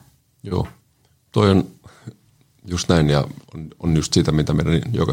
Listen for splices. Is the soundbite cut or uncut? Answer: uncut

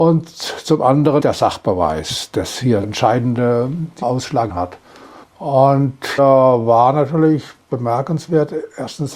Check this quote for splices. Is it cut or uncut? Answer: cut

